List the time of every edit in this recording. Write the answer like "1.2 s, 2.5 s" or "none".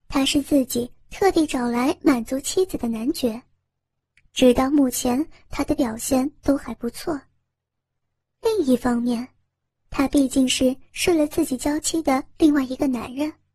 none